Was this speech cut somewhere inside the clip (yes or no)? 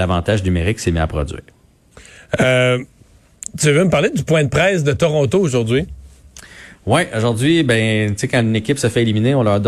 yes